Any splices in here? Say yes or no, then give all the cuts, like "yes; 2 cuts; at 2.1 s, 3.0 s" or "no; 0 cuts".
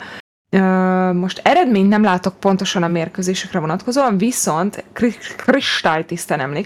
no; 0 cuts